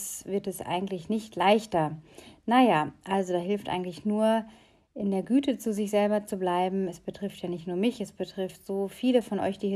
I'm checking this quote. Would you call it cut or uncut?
uncut